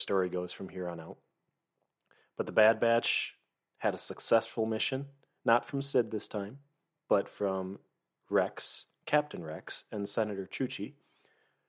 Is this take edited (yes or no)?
no